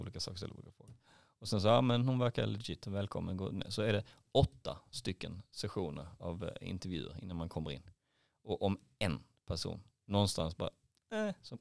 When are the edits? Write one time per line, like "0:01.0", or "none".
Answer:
none